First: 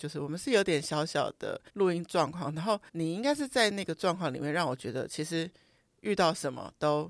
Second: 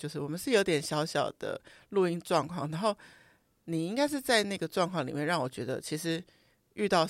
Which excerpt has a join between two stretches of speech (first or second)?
first